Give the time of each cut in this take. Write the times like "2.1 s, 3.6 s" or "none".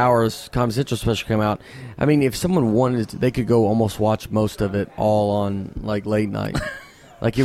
none